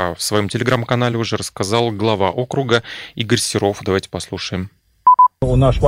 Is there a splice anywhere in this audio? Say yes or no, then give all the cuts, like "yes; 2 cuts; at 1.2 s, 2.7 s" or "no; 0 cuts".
no; 0 cuts